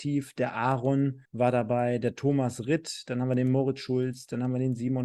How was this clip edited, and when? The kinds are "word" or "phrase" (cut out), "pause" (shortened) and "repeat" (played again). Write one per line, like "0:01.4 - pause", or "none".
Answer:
0:01.2 - pause